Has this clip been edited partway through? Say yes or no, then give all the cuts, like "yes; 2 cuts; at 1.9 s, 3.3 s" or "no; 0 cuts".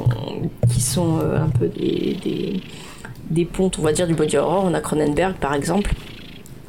no; 0 cuts